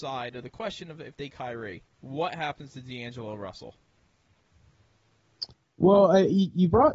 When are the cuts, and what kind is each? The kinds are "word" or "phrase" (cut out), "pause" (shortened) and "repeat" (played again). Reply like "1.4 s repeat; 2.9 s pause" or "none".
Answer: 1.3 s word; 1.9 s pause; 5.5 s pause